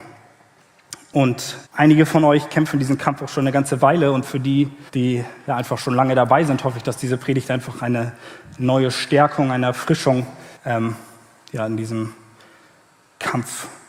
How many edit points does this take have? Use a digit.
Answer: 3